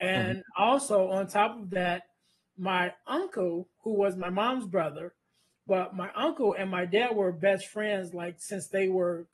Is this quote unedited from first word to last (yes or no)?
yes